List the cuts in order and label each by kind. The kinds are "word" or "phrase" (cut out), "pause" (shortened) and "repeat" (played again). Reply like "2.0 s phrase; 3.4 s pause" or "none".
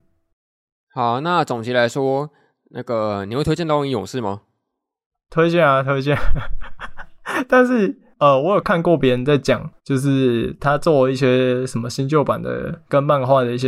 9.8 s pause